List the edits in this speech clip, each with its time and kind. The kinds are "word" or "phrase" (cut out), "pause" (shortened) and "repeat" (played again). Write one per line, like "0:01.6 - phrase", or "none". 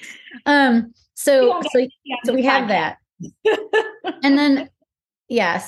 none